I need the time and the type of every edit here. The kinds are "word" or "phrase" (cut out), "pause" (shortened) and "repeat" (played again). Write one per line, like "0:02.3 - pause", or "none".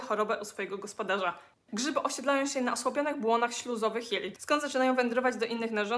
none